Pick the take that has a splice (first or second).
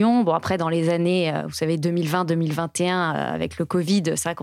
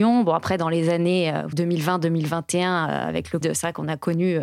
second